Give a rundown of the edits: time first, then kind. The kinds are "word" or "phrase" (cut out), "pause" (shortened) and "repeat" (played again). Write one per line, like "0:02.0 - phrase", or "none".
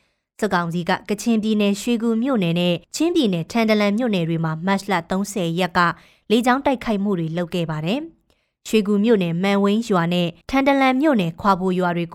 0:02.8 - pause
0:10.4 - pause